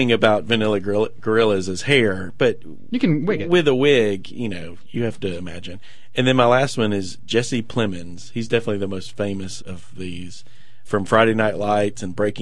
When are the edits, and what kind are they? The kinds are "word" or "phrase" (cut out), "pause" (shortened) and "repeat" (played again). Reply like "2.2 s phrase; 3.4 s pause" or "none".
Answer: 9.6 s word; 10.8 s word